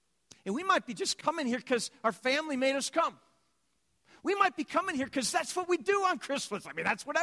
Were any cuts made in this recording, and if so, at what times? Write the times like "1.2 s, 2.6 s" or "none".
none

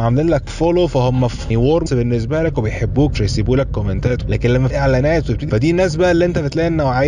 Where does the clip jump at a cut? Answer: 1.5 s, 1.9 s, 3.1 s, 4.2 s, 4.7 s, 5.5 s

